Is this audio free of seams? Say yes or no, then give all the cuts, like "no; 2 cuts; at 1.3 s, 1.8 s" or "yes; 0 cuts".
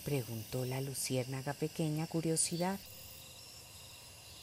no; 1 cut; at 2.1 s